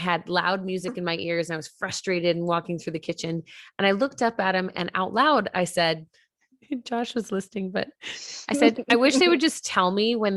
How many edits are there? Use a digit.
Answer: 1